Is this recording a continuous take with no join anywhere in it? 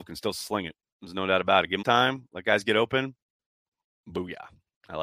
no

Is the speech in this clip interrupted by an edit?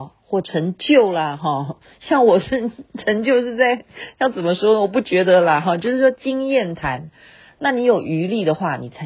no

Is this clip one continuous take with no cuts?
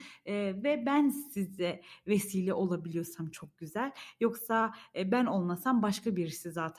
yes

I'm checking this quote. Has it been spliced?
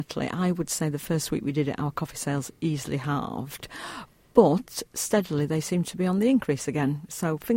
no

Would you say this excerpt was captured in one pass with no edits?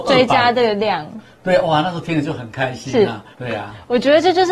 no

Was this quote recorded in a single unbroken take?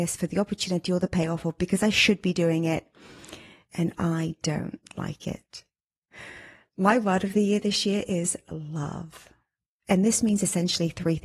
yes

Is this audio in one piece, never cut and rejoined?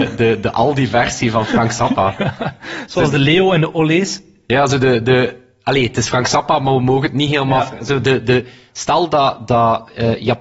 yes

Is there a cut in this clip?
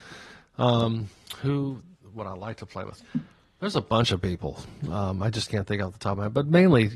no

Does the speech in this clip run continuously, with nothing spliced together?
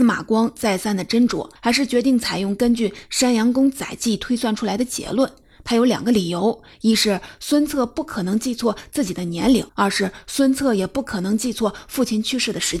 no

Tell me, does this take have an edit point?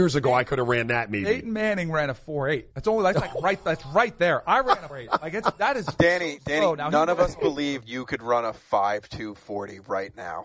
yes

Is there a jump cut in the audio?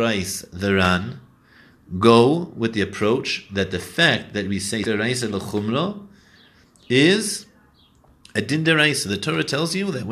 yes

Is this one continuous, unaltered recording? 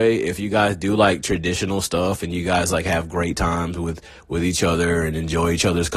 yes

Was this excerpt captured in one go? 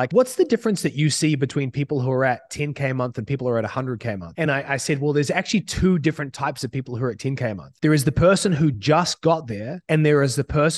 yes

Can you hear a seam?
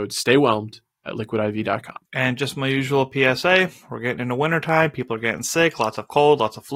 yes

